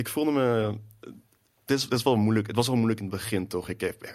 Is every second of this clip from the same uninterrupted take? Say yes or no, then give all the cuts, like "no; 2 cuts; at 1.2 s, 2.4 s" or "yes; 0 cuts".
yes; 0 cuts